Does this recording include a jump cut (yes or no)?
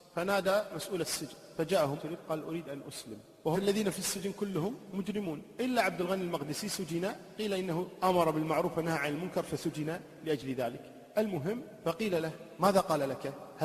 yes